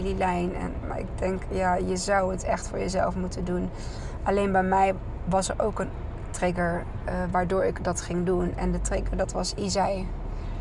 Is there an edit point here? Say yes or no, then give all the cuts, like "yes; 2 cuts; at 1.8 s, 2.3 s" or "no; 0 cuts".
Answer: no; 0 cuts